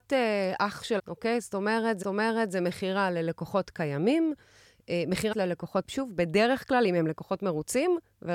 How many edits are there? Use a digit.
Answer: 4